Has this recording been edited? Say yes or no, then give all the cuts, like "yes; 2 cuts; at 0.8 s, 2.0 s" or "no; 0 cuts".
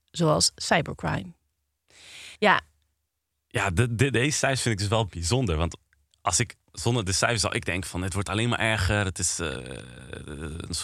yes; 1 cut; at 2.4 s